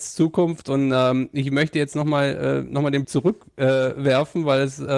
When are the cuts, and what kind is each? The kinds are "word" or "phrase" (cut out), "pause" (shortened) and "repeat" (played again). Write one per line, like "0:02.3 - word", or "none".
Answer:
0:03.0 - word